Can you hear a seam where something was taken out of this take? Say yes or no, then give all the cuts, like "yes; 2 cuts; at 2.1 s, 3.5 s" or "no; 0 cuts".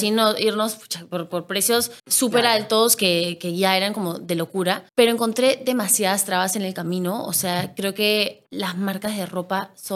yes; 3 cuts; at 2.0 s, 4.9 s, 8.5 s